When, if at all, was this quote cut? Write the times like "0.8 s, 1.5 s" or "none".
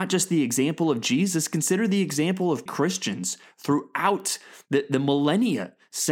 2.7 s